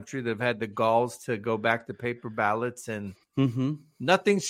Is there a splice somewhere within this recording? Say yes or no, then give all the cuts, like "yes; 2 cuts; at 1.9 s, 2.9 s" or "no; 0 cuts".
no; 0 cuts